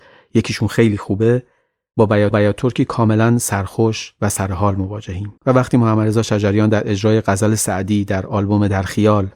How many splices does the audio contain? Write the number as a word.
two